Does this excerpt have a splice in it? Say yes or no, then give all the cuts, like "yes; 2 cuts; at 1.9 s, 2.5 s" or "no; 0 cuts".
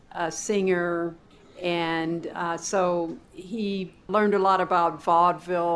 no; 0 cuts